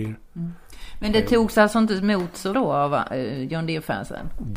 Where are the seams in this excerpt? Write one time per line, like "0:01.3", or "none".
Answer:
0:02.5